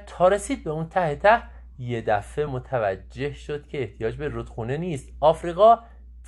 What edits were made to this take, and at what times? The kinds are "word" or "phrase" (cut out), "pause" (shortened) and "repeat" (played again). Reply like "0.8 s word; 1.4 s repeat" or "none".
none